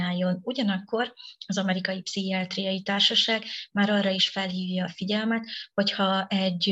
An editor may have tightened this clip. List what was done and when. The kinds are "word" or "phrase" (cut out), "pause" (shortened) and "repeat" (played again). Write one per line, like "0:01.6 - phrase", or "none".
none